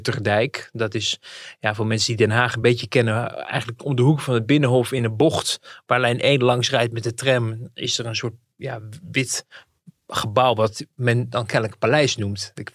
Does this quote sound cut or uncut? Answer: uncut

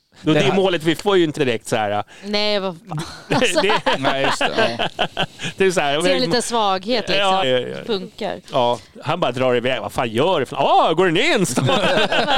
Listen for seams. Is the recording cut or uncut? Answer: cut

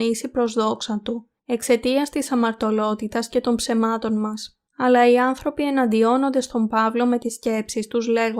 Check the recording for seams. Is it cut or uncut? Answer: cut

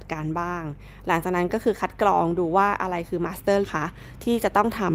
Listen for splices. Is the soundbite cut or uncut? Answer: cut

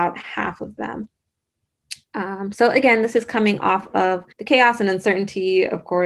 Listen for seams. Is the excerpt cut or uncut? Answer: cut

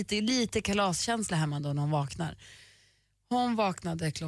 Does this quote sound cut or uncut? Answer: uncut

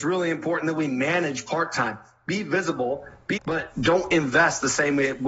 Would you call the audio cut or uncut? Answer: cut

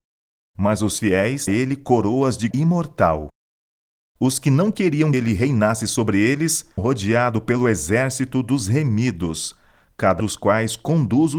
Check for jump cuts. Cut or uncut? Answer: cut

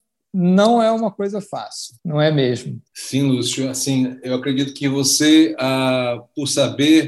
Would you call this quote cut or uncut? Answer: cut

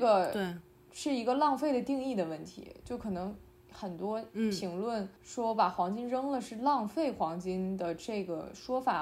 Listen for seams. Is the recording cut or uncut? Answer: cut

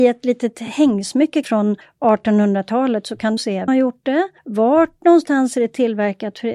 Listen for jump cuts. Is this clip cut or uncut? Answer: cut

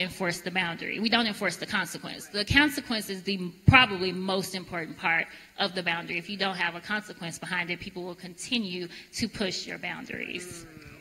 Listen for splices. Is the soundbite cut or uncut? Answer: uncut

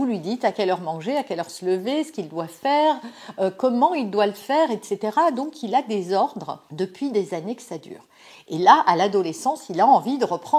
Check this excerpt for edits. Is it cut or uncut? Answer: uncut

